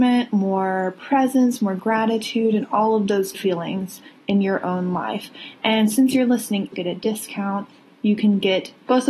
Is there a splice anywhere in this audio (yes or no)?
yes